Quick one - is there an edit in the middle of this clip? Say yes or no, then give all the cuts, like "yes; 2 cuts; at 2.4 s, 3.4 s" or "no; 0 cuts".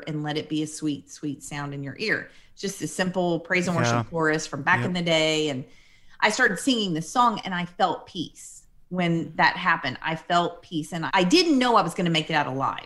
no; 0 cuts